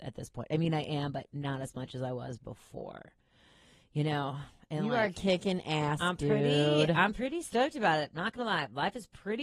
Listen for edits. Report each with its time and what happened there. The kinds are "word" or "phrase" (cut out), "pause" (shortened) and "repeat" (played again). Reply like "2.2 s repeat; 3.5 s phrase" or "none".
none